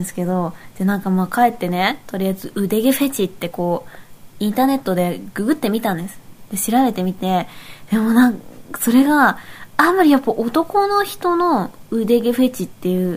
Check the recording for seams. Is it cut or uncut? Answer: uncut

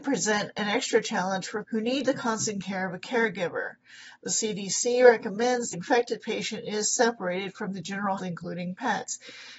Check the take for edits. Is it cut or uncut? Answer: cut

